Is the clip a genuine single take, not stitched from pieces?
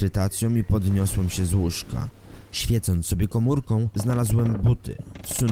yes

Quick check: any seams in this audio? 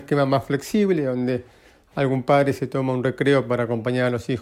no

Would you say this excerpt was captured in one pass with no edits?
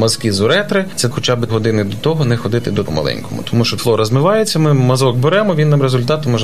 no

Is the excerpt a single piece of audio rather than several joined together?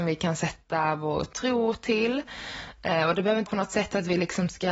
no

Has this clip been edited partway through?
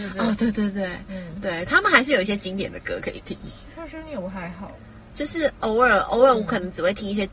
no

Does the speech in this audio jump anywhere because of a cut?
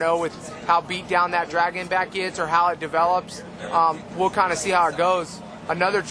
no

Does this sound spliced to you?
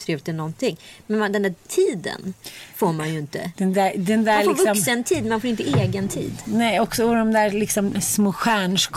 yes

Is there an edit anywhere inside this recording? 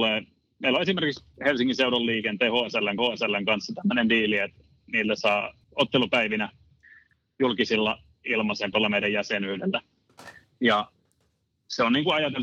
yes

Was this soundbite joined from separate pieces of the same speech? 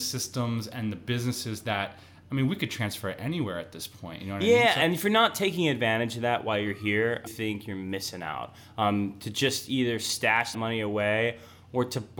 yes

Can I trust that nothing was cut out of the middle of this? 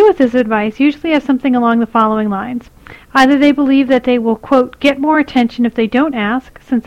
yes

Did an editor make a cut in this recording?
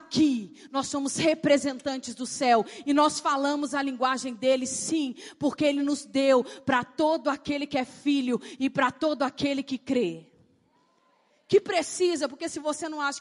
no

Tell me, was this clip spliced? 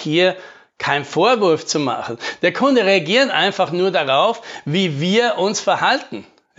no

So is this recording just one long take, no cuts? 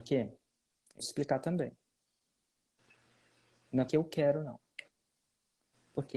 no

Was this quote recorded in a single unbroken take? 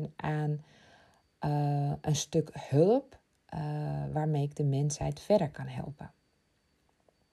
yes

